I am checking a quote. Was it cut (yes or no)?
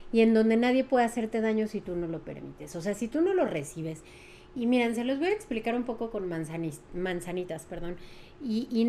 no